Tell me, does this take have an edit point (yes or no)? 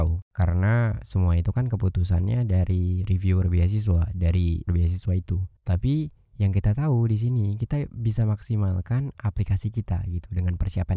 yes